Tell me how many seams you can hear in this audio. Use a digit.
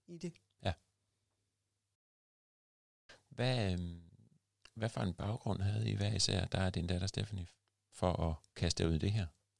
0